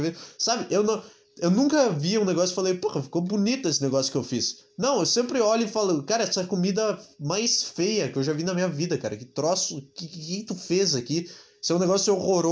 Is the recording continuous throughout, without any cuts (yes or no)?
yes